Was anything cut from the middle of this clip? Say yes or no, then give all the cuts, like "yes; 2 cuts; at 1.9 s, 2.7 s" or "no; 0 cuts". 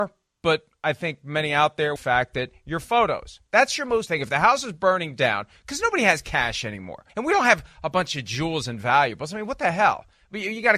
yes; 3 cuts; at 2.0 s, 4.1 s, 7.1 s